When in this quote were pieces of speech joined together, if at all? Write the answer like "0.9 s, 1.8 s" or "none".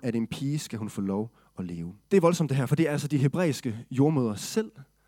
2.0 s